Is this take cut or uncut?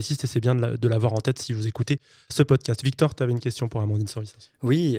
uncut